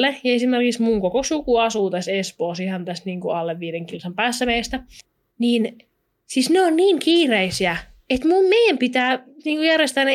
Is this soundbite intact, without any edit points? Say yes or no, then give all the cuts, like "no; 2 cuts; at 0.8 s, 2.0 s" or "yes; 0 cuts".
yes; 0 cuts